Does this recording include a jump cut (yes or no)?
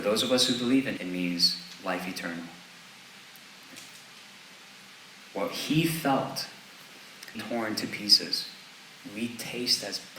yes